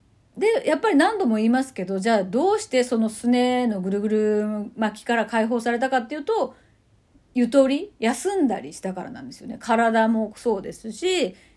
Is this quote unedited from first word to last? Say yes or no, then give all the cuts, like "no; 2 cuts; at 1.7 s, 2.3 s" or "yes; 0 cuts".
yes; 0 cuts